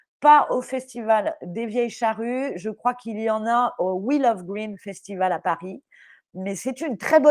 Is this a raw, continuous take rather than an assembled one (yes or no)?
yes